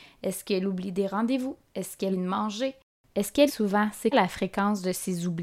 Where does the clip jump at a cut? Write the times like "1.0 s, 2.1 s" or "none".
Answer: 2.1 s, 3.5 s, 4.1 s